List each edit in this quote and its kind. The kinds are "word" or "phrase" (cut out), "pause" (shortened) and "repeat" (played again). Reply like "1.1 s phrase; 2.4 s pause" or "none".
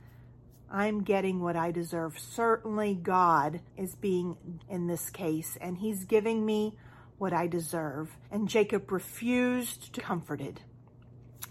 3.7 s pause; 4.6 s word; 8.2 s pause; 10.0 s word